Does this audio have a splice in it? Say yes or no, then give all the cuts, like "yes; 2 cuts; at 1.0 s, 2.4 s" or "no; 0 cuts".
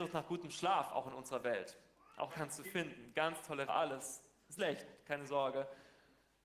yes; 4 cuts; at 2.3 s, 2.6 s, 3.7 s, 4.6 s